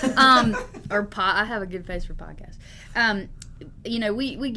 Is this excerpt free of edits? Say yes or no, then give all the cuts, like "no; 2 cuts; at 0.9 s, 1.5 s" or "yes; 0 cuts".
yes; 0 cuts